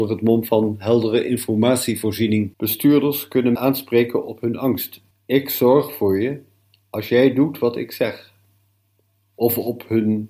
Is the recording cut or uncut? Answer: cut